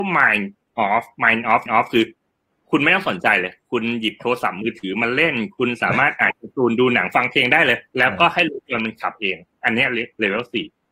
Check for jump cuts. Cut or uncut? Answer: cut